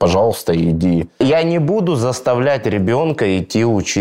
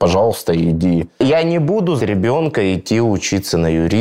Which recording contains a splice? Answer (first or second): second